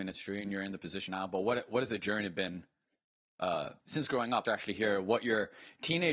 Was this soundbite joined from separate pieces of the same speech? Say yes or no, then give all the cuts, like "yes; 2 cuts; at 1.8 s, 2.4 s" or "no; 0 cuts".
yes; 3 cuts; at 1.1 s, 3.8 s, 4.4 s